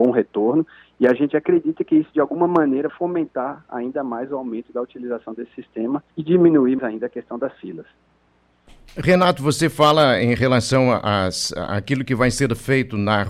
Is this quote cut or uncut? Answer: cut